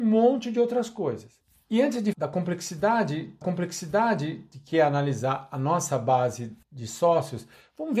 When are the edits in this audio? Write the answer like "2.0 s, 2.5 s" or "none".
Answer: 2.1 s, 3.4 s, 6.6 s